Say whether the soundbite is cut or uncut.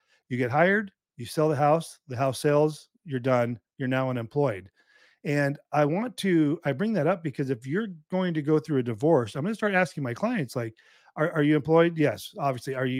uncut